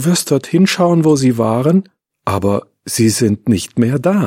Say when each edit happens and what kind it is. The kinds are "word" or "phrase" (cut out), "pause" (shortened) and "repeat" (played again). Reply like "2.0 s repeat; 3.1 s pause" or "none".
none